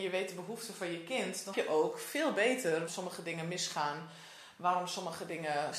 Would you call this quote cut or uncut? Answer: cut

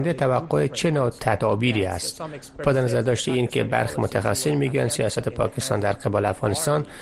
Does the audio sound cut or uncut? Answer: uncut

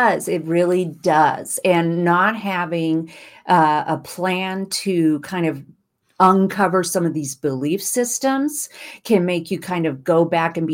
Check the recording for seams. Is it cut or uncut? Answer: uncut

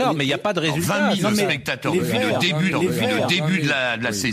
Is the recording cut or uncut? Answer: cut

